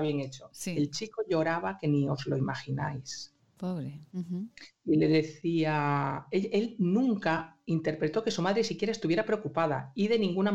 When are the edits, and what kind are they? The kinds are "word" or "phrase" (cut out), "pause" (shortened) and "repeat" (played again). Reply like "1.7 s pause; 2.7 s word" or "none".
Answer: 4.1 s pause